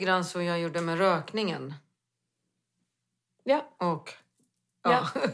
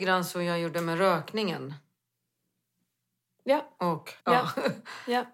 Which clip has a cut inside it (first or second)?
second